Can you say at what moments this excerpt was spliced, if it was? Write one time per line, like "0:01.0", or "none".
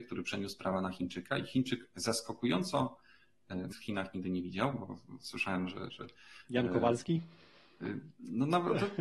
0:03.7